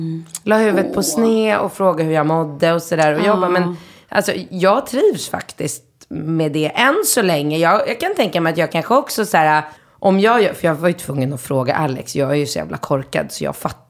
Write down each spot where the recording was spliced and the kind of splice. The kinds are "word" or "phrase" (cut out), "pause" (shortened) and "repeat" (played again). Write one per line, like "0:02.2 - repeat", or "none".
0:09.8 - pause

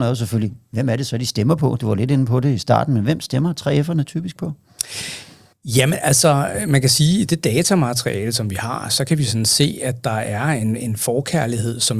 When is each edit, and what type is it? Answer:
none

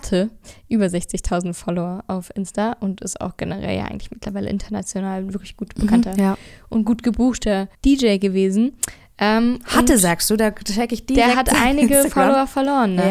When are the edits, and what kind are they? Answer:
0:07.7 - pause

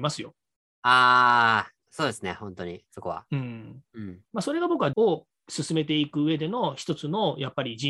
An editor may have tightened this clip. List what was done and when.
0:01.8 - pause
0:04.3 - pause
0:04.9 - word

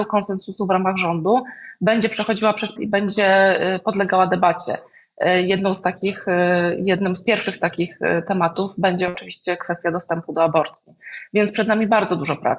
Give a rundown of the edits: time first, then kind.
0:02.8 - word

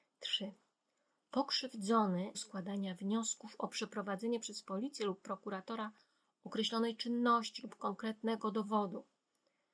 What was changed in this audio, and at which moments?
0:02.3 - phrase

